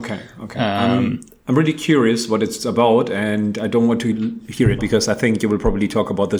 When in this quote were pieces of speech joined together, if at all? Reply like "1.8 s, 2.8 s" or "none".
4.8 s